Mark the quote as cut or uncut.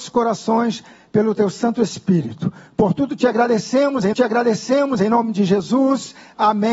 cut